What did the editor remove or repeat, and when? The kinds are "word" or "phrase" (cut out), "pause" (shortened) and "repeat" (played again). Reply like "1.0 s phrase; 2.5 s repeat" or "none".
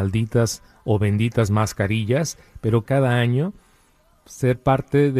2.8 s phrase